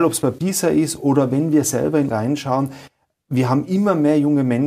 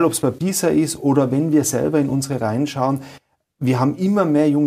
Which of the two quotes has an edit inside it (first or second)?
first